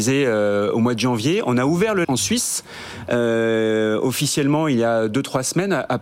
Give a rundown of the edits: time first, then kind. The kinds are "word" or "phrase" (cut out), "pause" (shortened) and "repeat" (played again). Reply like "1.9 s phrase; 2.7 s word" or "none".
2.0 s word